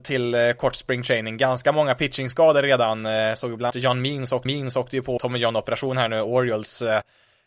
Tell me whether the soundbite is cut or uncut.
cut